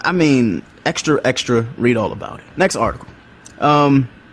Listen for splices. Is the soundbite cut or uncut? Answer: cut